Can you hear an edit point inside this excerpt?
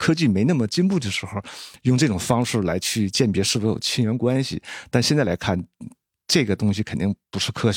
no; 0 cuts

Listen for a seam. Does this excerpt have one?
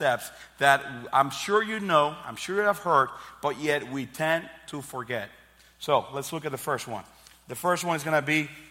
no; 0 cuts

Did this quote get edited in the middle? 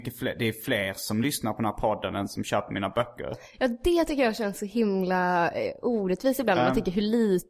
no; 0 cuts

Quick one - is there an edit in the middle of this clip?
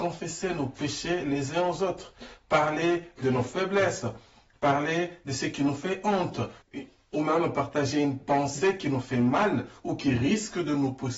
no; 0 cuts

